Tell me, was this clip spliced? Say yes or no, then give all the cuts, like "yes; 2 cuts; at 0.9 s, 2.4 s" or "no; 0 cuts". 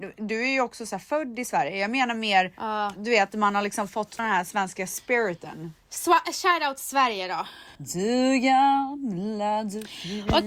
yes; 2 cuts; at 4.2 s, 7.8 s